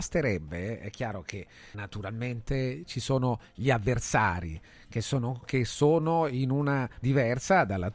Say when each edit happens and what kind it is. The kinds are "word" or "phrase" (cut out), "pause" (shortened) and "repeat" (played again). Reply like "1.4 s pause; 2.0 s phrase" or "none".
1.7 s word; 5.4 s word; 7.0 s word